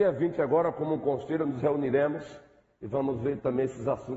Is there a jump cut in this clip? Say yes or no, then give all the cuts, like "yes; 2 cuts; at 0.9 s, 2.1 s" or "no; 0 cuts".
no; 0 cuts